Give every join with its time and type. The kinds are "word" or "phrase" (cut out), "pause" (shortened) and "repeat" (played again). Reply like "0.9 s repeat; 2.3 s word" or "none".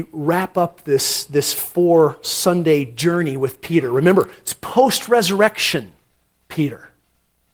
none